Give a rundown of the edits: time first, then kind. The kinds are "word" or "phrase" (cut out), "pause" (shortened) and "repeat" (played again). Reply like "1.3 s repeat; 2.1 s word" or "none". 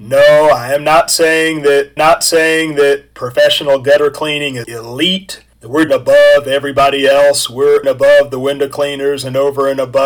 2.0 s repeat; 4.6 s word; 5.9 s phrase; 7.8 s phrase